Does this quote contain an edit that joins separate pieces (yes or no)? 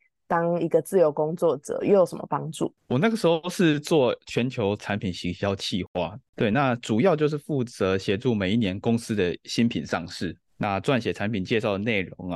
yes